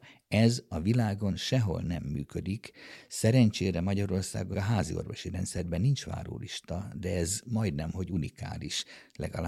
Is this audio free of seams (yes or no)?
no